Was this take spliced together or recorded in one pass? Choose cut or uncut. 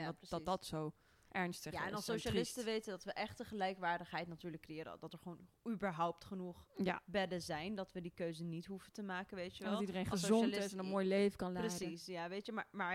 uncut